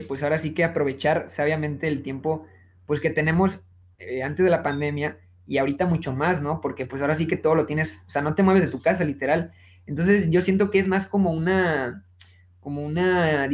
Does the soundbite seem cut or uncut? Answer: uncut